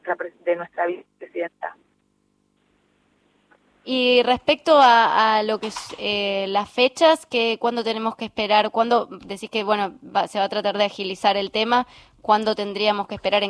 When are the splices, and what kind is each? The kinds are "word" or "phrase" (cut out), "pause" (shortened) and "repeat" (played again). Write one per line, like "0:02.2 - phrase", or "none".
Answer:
none